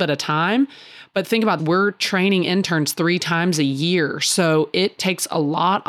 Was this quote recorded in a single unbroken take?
no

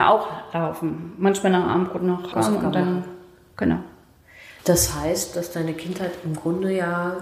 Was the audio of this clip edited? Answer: yes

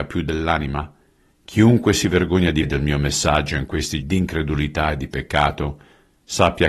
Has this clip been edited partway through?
yes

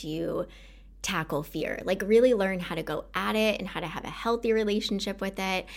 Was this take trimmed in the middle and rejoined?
no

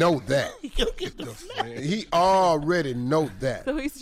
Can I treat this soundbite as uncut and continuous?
yes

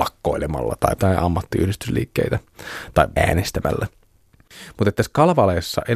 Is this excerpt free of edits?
no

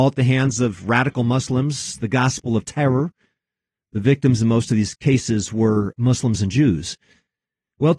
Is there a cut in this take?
no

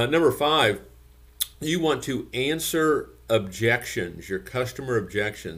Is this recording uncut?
yes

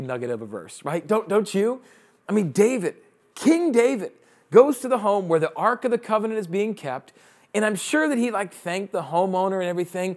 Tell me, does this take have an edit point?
no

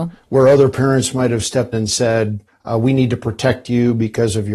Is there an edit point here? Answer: yes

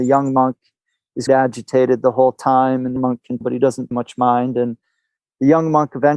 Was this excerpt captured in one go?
no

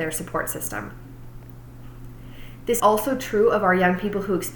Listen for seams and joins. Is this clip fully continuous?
no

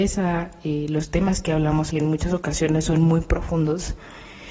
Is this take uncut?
no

